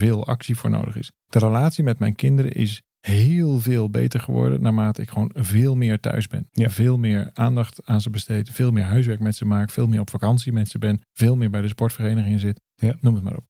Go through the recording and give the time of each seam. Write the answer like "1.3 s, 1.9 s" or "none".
1.2 s, 2.9 s, 11.0 s